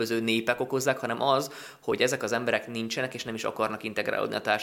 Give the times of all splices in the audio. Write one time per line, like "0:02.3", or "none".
none